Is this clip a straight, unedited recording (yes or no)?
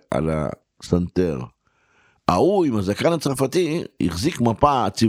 yes